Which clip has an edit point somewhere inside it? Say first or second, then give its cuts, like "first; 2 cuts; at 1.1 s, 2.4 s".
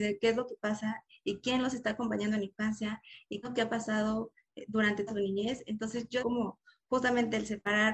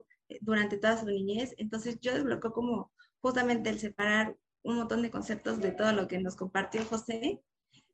first; 3 cuts; at 3.4 s, 5.1 s, 6.2 s